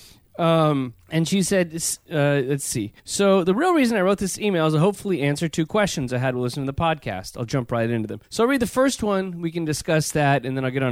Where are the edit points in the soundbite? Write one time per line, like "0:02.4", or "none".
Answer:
0:01.0
0:03.0
0:08.2